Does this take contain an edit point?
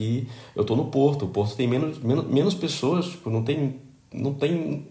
no; 0 cuts

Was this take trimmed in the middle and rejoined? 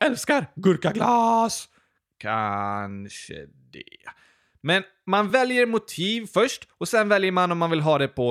no; 0 cuts

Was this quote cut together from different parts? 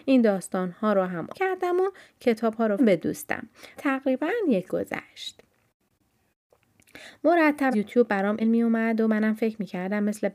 yes; 6 cuts; at 1.3 s, 2.8 s, 3.8 s, 4.7 s, 7.7 s, 8.4 s

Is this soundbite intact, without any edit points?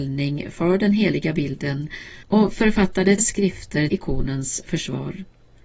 no; 3 cuts; at 2.2 s, 3.2 s, 3.9 s

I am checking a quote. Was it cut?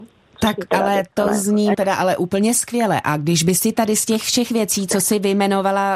yes; 1 cut; at 1.7 s

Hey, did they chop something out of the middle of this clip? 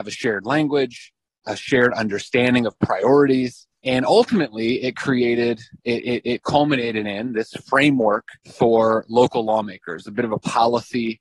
yes; 3 cuts; at 1.4 s, 3.7 s, 8.4 s

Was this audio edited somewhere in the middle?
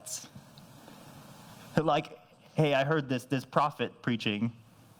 no; 0 cuts

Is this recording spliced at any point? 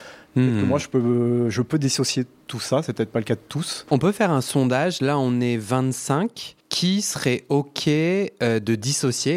yes; 1 cut; at 6.6 s

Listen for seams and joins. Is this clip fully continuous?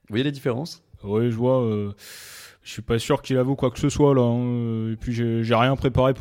yes; 0 cuts

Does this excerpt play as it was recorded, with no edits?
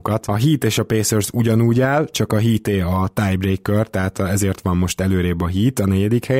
yes; 0 cuts

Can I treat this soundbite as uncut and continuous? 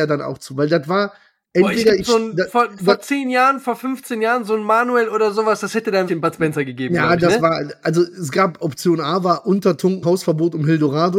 no; 2 cuts; at 6.1 s, 10.0 s

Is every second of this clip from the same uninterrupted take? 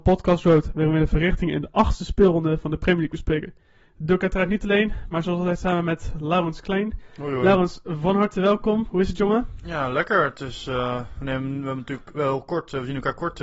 yes; 0 cuts

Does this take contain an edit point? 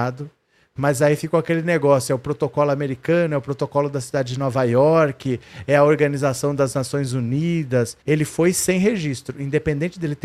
yes; 1 cut; at 8.0 s

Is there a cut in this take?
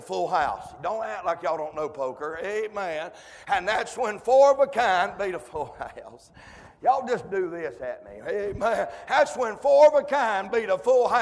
no; 0 cuts

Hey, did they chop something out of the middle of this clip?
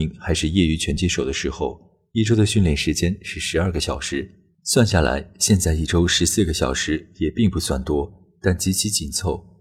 yes; 1 cut; at 4.6 s

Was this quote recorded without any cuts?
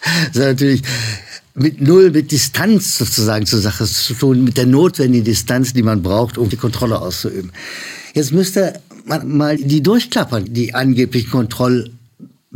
no; 4 cuts; at 6.5 s, 9.2 s, 9.6 s, 10.5 s

